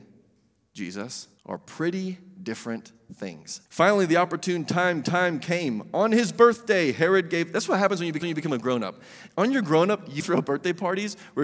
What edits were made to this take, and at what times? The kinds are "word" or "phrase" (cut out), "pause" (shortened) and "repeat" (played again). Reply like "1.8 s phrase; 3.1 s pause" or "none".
1.4 s pause; 3.7 s pause; 5.0 s repeat; 8.2 s repeat; 10.2 s phrase